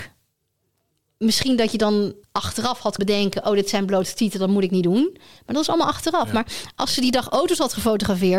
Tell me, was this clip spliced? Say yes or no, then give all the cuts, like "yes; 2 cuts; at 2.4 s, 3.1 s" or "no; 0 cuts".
yes; 3 cuts; at 0.9 s, 2.2 s, 3.0 s